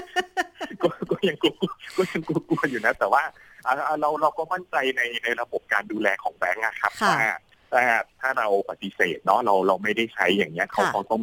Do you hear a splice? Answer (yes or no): no